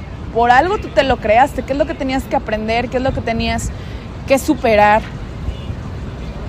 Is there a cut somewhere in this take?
no; 0 cuts

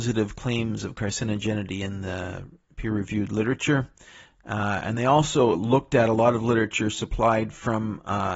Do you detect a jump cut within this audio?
no; 0 cuts

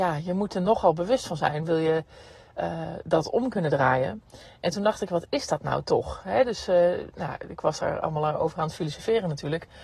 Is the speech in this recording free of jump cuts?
yes; 0 cuts

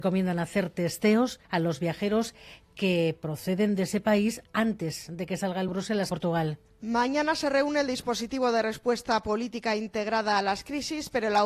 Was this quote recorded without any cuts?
no; 3 cuts; at 1.4 s, 5.7 s, 6.1 s

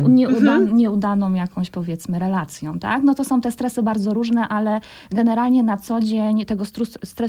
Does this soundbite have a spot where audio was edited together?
no; 0 cuts

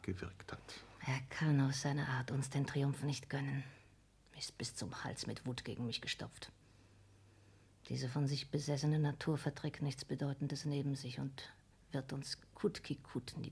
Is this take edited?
no; 0 cuts

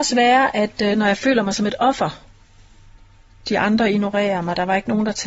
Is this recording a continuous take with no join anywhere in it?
yes; 0 cuts

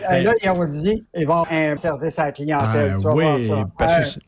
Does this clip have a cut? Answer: yes; 3 cuts; at 1.1 s, 1.4 s, 1.8 s

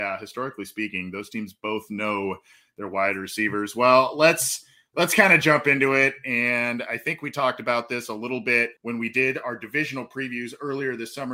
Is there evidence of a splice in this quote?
yes; 1 cut; at 8.8 s

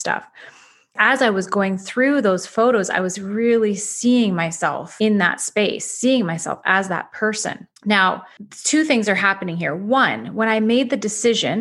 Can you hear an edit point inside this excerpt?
yes; 1 cut; at 7.8 s

